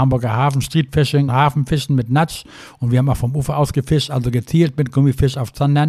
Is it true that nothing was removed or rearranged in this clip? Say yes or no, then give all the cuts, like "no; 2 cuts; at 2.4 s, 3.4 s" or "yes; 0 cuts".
no; 1 cut; at 1.3 s